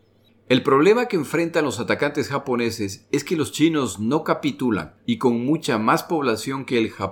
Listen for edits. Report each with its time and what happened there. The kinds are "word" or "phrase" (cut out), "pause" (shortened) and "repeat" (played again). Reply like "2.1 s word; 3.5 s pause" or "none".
5.0 s pause